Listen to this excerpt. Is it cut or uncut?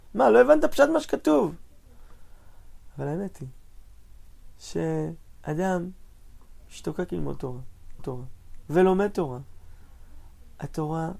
cut